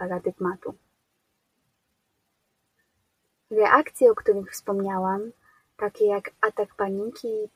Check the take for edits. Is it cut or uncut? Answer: uncut